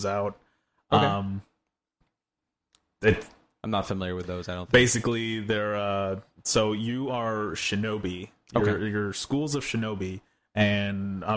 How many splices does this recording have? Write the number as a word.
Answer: zero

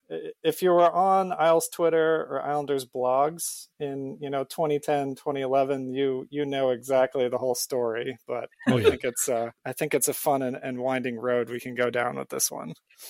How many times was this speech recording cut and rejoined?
two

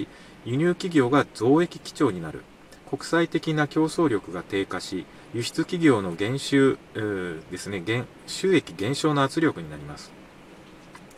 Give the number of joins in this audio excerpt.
three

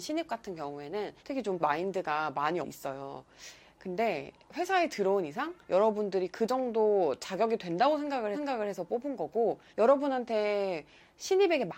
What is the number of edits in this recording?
six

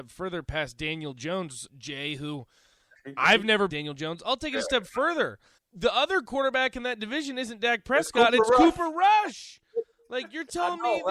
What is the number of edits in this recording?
three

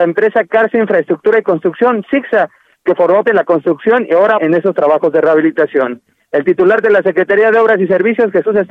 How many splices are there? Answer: two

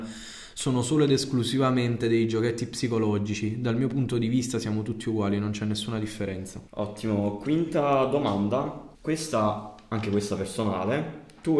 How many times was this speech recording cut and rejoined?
two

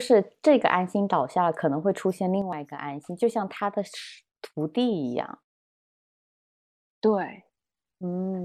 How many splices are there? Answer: zero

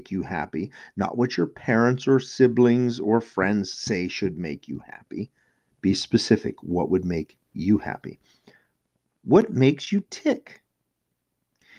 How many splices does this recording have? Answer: zero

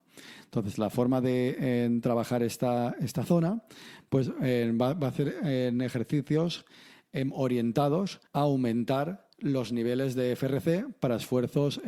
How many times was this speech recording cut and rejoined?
two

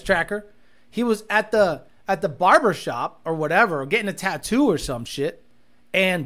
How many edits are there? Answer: zero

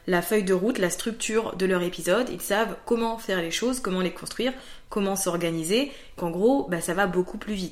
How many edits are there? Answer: one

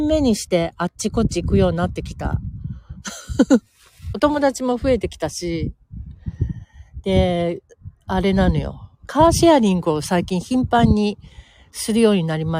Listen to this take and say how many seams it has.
zero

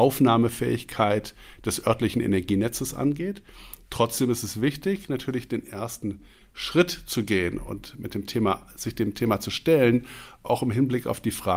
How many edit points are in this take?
zero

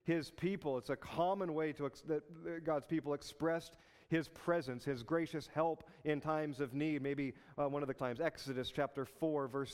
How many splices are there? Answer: one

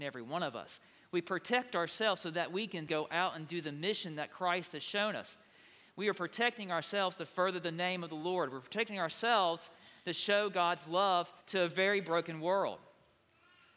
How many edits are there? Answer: two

